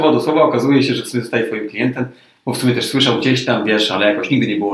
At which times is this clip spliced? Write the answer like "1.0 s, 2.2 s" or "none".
none

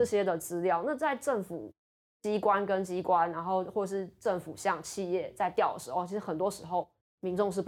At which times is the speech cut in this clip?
none

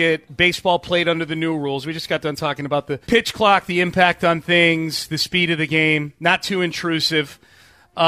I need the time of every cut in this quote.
3.0 s

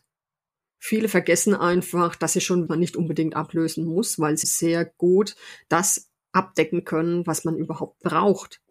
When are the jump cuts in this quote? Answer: 2.7 s, 4.4 s

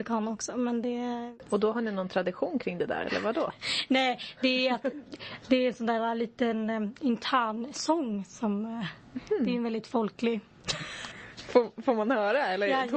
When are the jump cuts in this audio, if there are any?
none

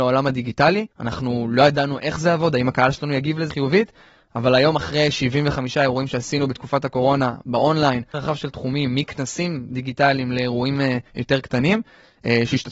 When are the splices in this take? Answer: 0.9 s, 3.5 s, 8.1 s, 11.1 s

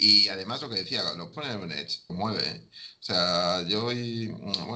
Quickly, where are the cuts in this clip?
1.3 s, 2.1 s

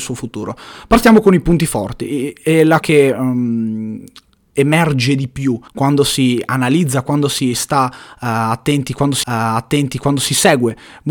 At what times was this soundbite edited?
2.8 s, 5.7 s, 9.2 s

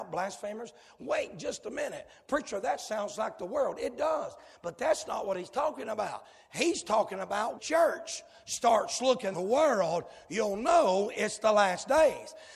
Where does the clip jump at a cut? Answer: 7.6 s, 9.3 s

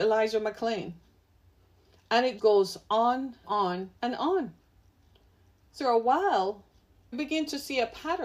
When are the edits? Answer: 2.4 s, 3.4 s, 4.0 s, 5.8 s, 7.1 s

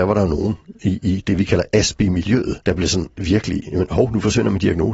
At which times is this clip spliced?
2.6 s

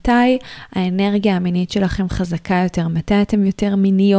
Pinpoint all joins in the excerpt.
none

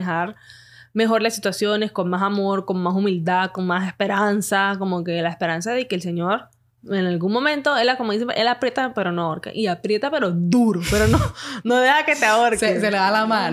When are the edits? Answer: 6.7 s

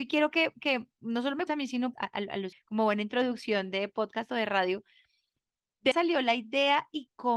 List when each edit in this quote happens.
1.5 s, 1.9 s, 2.5 s, 5.9 s

